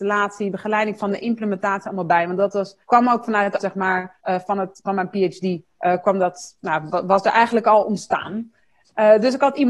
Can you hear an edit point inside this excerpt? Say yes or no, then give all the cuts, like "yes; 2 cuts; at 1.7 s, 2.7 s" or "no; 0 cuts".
yes; 4 cuts; at 2.8 s, 3.6 s, 4.2 s, 5.7 s